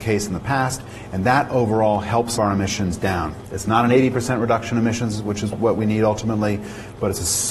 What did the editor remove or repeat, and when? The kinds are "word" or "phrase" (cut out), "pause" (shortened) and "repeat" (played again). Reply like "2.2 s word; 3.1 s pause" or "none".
2.4 s phrase